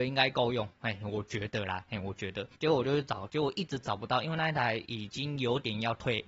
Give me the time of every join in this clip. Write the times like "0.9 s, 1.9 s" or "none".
2.5 s